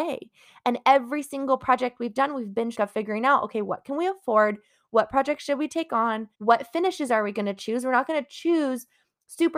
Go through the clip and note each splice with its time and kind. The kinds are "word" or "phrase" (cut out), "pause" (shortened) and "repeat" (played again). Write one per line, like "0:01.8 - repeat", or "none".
0:02.7 - word
0:06.3 - pause